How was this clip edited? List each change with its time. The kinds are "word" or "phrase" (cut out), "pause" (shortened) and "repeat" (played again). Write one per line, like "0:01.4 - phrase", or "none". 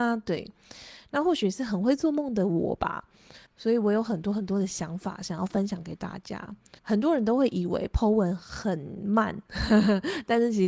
0:03.5 - pause
0:06.8 - pause